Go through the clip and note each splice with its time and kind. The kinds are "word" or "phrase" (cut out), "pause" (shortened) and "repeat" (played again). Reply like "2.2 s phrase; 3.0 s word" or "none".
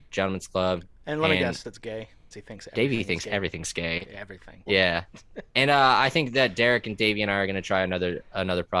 1.6 s phrase; 2.3 s word; 4.7 s word